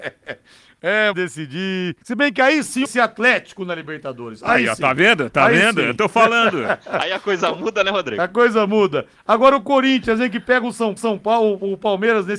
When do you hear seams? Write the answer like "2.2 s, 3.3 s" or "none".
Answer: 1.1 s, 2.0 s, 2.8 s, 11.0 s